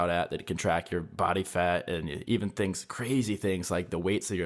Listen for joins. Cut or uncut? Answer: uncut